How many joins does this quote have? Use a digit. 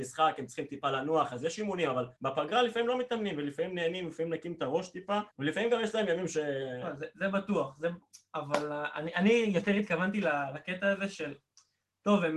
2